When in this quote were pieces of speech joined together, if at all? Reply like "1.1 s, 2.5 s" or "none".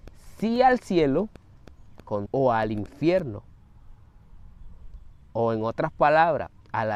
2.3 s